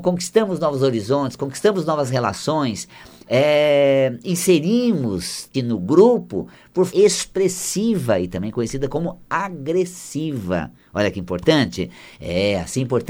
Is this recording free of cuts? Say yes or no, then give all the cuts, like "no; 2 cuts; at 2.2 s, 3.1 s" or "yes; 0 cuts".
no; 2 cuts; at 5.5 s, 6.9 s